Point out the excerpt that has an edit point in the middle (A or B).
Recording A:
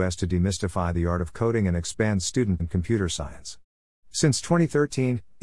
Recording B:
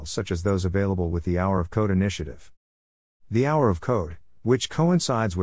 A